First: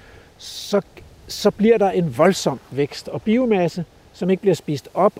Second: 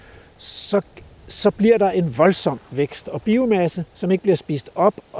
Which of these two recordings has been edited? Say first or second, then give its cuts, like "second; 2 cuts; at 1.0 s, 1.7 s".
second; 1 cut; at 3.9 s